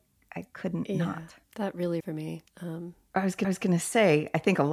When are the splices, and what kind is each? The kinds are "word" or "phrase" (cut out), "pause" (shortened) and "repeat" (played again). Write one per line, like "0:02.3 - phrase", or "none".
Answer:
0:01.4 - pause
0:02.0 - word
0:02.5 - pause
0:03.4 - repeat